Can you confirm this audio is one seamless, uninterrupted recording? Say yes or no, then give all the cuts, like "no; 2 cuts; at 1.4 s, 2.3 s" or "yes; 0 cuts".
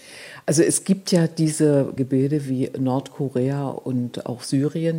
no; 1 cut; at 2.0 s